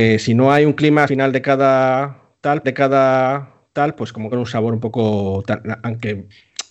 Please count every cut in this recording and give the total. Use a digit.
3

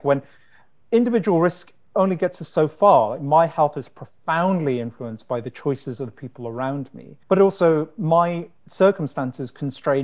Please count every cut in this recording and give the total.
1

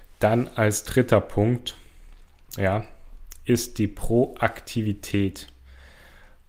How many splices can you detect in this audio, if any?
0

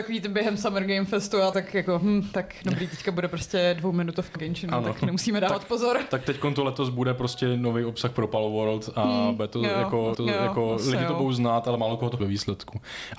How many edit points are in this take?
4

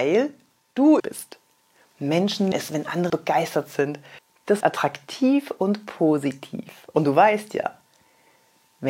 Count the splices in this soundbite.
4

